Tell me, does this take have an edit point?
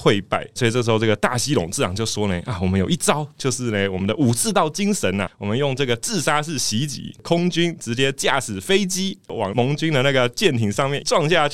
yes; 1 cut; at 5.3 s

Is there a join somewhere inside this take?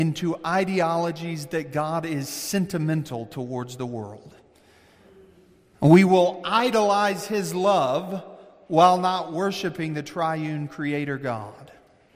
no; 0 cuts

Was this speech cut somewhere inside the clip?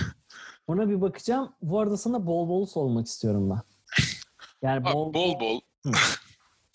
yes; 1 cut; at 5.7 s

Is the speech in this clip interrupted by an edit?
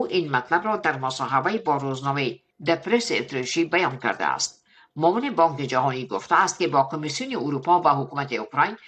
no; 0 cuts

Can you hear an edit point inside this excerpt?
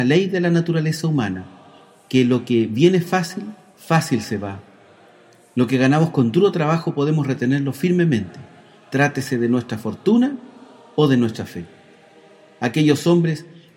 no; 0 cuts

